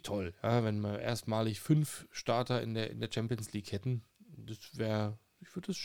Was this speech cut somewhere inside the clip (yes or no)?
no